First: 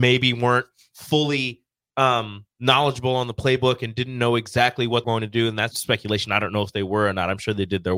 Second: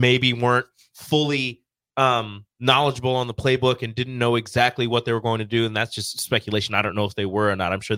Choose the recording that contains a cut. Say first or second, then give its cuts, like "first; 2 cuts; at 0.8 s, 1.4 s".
first; 2 cuts; at 5.0 s, 5.7 s